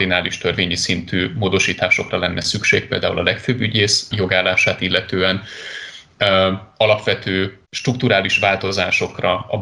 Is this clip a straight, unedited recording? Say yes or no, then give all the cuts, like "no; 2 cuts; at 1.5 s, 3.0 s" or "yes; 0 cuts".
no; 2 cuts; at 4.1 s, 7.6 s